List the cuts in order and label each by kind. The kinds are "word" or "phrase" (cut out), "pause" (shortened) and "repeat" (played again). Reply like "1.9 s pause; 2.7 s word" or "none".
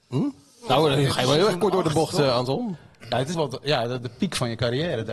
3.3 s word